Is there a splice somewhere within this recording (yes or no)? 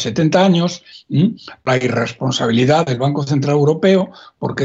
yes